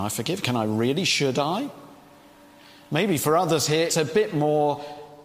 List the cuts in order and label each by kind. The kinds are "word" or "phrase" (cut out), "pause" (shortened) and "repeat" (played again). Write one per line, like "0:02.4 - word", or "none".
0:03.9 - word

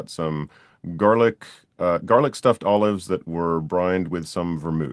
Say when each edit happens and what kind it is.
none

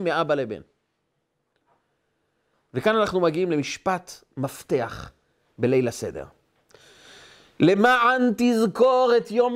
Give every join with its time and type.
none

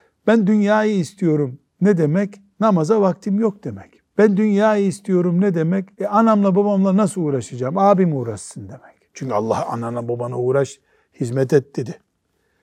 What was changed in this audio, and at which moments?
0:02.5 - pause
0:04.1 - pause
0:05.9 - pause
0:09.1 - pause

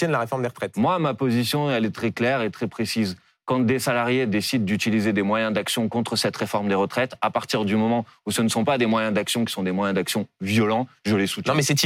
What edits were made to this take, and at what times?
none

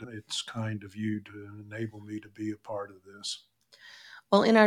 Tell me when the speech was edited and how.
none

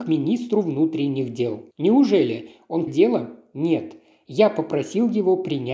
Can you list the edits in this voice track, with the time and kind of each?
0:01.7 - pause
0:02.9 - phrase

